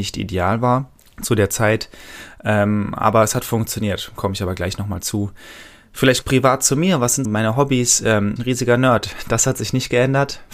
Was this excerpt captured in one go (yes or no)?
no